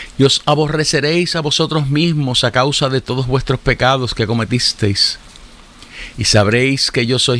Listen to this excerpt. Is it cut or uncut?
uncut